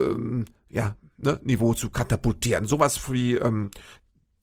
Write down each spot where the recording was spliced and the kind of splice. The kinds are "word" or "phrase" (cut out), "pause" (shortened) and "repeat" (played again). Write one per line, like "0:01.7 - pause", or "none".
none